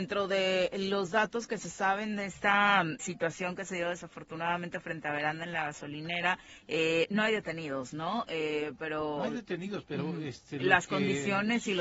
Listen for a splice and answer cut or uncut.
cut